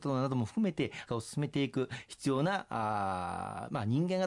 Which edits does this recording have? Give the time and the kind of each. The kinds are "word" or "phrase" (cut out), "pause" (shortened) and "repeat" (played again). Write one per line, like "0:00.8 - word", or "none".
0:01.1 - word

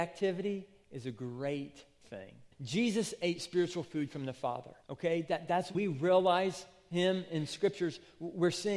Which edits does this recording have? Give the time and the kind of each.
0:02.5 - pause
0:04.8 - pause
0:05.7 - word

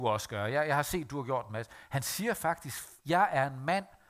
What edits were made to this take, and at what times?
0:03.0 - pause

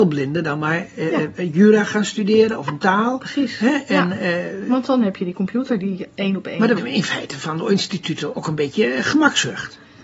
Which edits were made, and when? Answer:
0:06.8 - word
0:08.3 - word

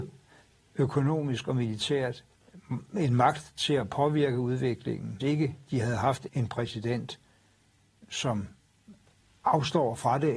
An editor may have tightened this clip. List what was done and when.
0:05.2 - word
0:06.3 - word

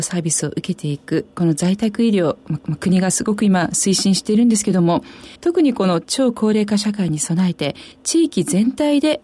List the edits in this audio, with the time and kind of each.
0:02.6 - repeat
0:05.4 - pause
0:07.9 - pause

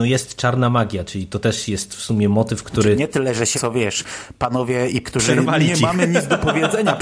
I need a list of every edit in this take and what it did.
0:03.5 - word
0:05.0 - word

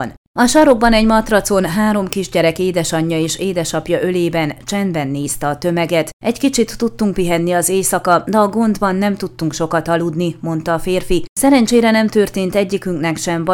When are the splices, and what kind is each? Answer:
none

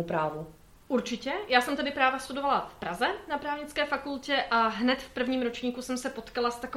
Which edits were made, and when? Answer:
none

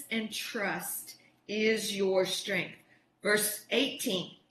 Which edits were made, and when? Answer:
none

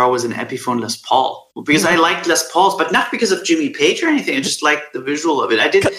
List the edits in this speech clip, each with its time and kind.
0:01.5 - pause

